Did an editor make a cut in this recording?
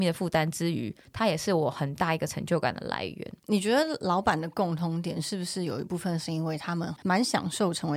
yes; 1 cut; at 3.4 s

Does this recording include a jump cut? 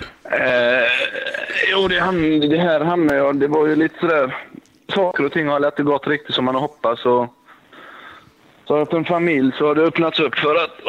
yes; 1 cut; at 8.9 s

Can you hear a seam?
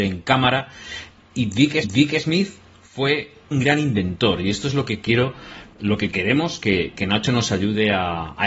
yes; 3 cuts; at 1.2 s, 1.8 s, 3.5 s

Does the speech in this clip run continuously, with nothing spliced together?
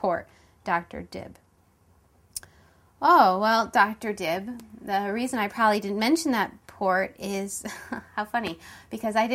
yes; 0 cuts

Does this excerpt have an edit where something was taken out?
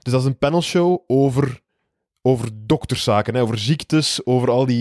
no; 0 cuts

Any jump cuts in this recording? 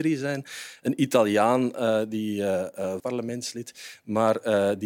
yes; 1 cut; at 3.0 s

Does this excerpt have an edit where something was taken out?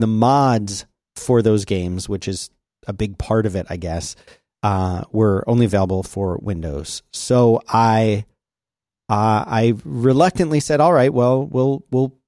no; 0 cuts

